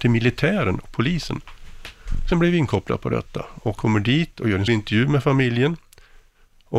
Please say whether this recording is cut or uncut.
cut